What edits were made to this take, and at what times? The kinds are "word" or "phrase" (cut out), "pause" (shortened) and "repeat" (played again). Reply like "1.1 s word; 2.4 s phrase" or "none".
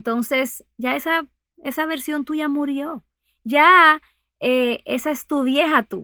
none